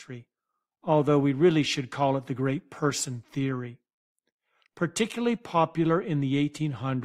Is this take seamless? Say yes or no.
yes